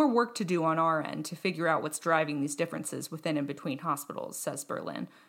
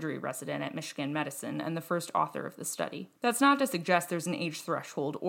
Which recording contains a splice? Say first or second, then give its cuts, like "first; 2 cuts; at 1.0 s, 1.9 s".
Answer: second; 1 cut; at 3.2 s